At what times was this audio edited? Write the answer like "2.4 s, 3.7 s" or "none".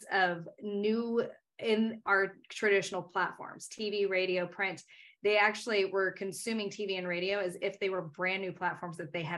none